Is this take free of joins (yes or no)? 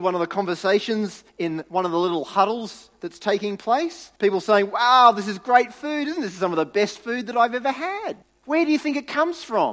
no